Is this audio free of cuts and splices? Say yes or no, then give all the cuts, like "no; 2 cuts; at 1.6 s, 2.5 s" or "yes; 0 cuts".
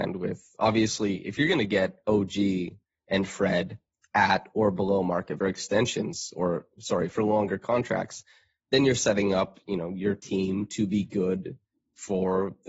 no; 1 cut; at 5.4 s